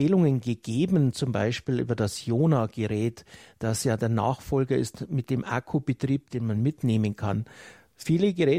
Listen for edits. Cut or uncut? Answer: uncut